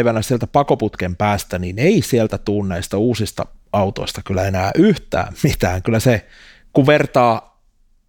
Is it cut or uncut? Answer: uncut